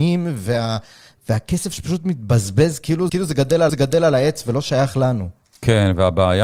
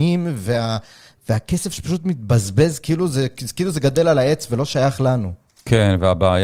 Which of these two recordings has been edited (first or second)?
first